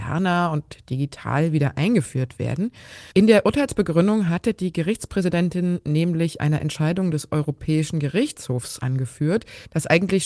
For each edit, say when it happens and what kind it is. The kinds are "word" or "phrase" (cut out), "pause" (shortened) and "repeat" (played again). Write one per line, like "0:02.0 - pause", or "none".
0:03.1 - pause